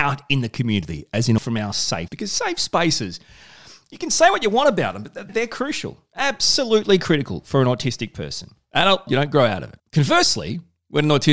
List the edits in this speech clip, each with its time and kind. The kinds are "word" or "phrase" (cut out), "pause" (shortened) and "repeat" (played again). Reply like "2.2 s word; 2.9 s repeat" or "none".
1.4 s word; 2.1 s word; 5.3 s word; 9.1 s word